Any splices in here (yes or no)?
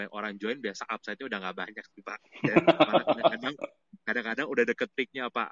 no